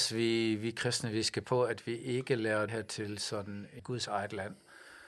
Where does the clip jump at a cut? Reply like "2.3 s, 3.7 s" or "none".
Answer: 1.4 s, 2.7 s, 3.8 s

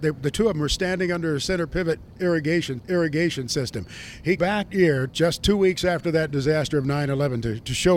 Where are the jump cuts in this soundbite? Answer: 2.8 s, 4.4 s, 4.7 s, 5.1 s

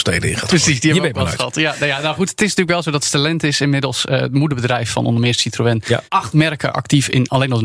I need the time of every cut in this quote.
6.1 s

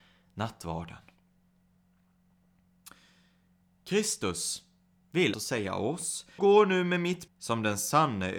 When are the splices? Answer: 5.3 s, 6.4 s, 7.3 s

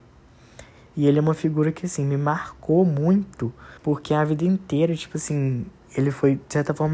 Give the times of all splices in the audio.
3.8 s

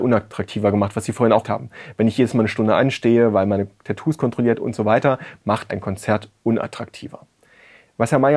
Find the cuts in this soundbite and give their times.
1.4 s, 5.7 s

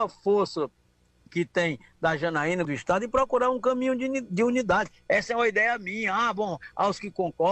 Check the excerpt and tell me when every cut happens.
2.6 s

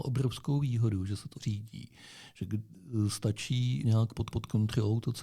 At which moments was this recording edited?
1.3 s, 3.8 s, 4.3 s

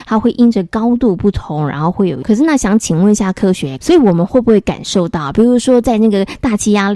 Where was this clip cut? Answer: 3.8 s

